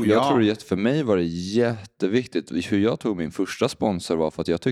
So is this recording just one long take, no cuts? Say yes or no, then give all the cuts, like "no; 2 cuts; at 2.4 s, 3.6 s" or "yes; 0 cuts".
yes; 0 cuts